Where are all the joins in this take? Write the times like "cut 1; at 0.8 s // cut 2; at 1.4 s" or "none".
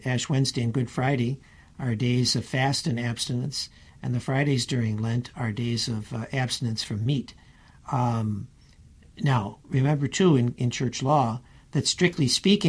none